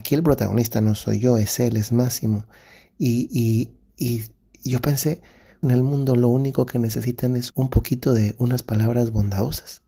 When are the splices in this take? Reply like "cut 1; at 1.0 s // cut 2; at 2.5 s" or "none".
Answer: cut 1; at 5.6 s // cut 2; at 7.5 s